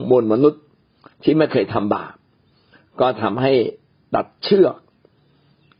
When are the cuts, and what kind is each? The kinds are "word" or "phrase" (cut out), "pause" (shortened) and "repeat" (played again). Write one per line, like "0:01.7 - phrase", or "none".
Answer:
none